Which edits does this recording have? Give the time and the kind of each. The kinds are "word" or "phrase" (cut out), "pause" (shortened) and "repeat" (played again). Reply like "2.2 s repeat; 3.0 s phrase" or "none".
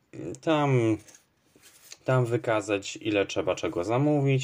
2.0 s pause